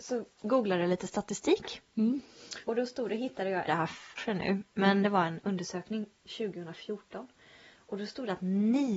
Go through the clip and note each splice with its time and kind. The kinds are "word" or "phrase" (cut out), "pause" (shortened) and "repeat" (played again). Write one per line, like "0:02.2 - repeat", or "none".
0:02.6 - pause
0:03.7 - phrase
0:04.2 - phrase

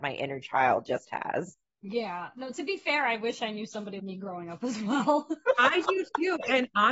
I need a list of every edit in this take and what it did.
0:04.0 - word

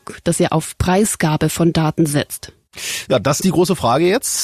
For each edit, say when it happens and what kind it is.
0:03.4 - word

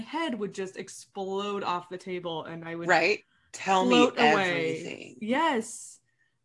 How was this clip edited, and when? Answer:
none

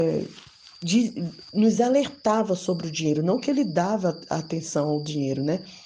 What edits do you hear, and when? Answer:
none

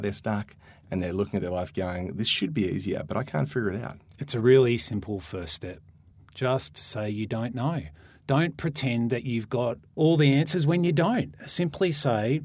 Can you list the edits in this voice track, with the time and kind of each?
none

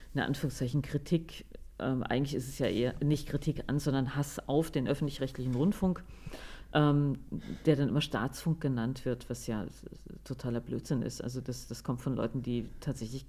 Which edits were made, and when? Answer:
none

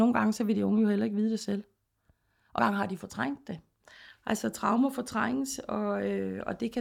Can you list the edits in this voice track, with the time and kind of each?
0:02.6 - word

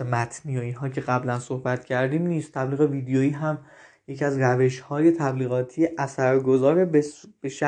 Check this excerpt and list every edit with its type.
none

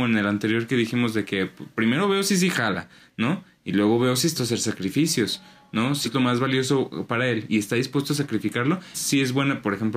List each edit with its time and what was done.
0:04.4 - word
0:06.0 - word
0:08.9 - word

